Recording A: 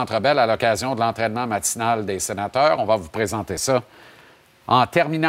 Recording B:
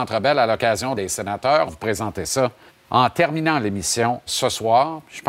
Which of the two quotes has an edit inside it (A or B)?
B